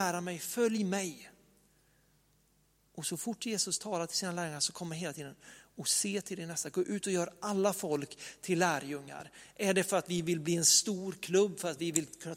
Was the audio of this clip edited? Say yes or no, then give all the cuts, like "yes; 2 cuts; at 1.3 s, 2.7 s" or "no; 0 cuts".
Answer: no; 0 cuts